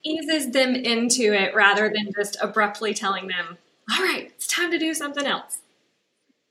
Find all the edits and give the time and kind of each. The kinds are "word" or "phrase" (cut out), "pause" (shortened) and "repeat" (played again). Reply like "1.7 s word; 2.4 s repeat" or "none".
none